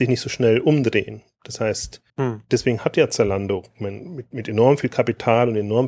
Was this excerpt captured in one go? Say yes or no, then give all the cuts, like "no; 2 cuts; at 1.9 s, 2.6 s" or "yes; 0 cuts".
no; 2 cuts; at 2.1 s, 3.7 s